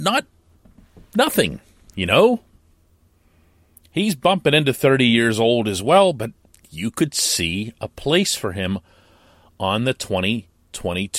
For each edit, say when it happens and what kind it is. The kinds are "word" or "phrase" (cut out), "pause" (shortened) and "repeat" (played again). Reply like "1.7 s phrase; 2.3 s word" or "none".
none

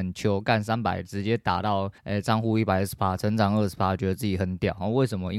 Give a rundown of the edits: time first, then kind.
2.0 s pause

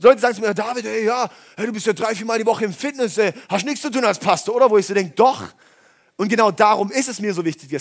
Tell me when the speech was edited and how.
none

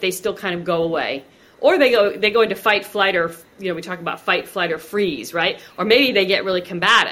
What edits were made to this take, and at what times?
none

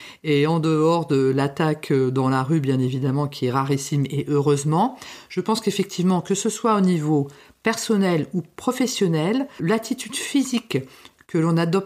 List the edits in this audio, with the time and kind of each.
9.6 s word

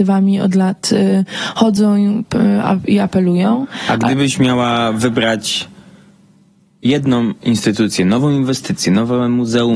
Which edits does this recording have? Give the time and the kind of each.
none

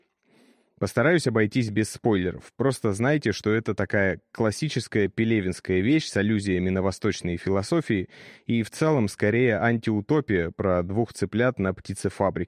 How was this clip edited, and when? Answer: none

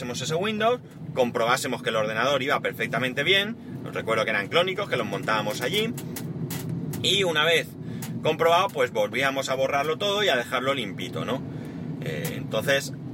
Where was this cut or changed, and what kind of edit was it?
none

